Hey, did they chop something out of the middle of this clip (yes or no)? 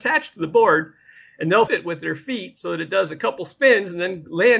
yes